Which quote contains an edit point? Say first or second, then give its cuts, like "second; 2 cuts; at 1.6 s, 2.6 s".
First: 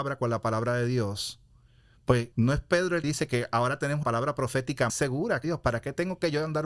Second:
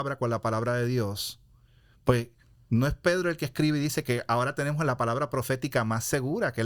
first; 5 cuts; at 2.3 s, 3.0 s, 4.0 s, 4.9 s, 5.4 s